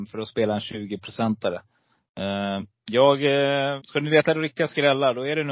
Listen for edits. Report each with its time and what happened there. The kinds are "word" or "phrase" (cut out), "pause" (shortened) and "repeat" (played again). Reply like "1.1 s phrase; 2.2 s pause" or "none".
3.8 s word